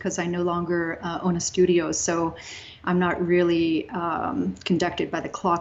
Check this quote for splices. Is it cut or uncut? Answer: uncut